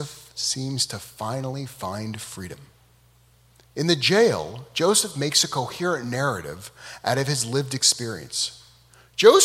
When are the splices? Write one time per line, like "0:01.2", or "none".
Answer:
none